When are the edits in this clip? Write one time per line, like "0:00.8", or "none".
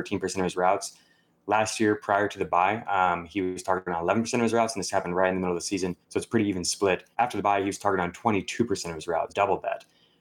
0:06.0
0:07.1
0:09.3